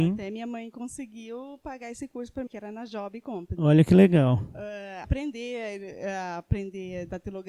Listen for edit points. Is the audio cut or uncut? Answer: cut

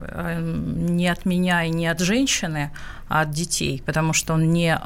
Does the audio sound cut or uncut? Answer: uncut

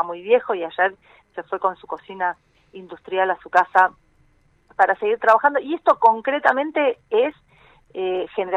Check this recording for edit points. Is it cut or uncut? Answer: uncut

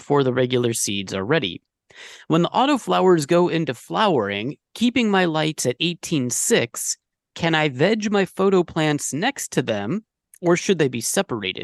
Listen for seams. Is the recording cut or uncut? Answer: uncut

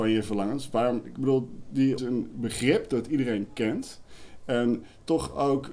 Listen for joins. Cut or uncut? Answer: cut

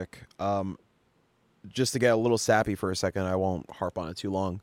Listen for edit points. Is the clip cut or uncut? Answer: uncut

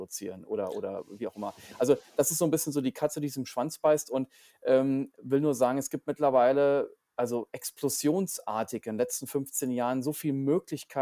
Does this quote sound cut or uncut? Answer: uncut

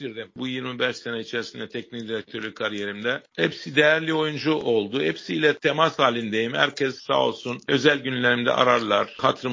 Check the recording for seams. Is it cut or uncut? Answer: uncut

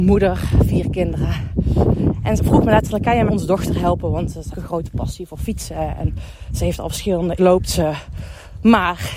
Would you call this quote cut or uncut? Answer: cut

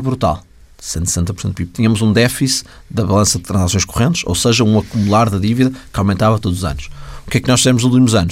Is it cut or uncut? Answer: uncut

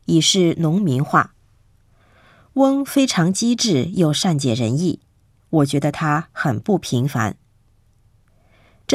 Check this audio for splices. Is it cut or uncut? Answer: uncut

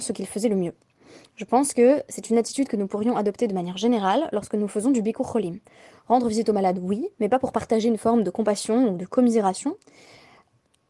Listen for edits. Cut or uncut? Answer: uncut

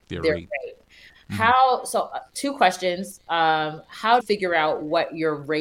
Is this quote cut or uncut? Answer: cut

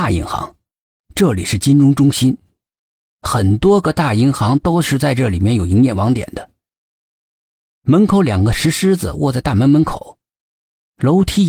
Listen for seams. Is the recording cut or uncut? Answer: uncut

